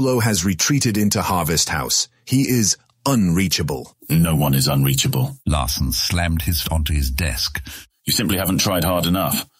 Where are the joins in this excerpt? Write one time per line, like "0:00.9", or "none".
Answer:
0:04.0
0:05.4
0:06.6